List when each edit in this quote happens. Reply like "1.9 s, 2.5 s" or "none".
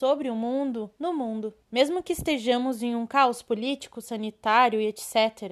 0.9 s, 1.6 s